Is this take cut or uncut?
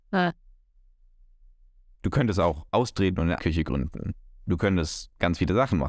cut